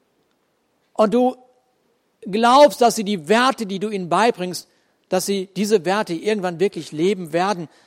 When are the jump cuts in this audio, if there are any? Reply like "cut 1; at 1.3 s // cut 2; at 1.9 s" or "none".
none